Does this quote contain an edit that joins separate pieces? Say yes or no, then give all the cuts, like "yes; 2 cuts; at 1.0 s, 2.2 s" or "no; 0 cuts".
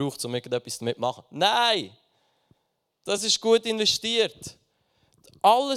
no; 0 cuts